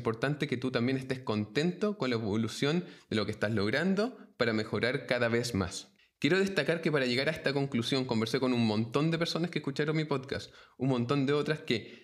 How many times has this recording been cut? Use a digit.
1